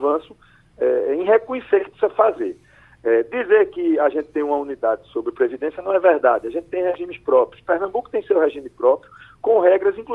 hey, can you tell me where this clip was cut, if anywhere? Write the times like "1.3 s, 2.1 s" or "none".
none